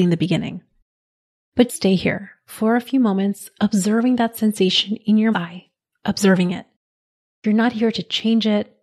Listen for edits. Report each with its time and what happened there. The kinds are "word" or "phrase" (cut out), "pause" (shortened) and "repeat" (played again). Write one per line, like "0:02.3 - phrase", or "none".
0:01.7 - word
0:05.3 - word

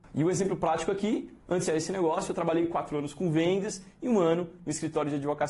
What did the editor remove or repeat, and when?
0:01.7 - phrase

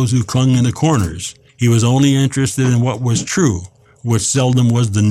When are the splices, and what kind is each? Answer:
0:01.5 - pause

